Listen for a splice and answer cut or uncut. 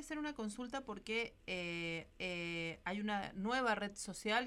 cut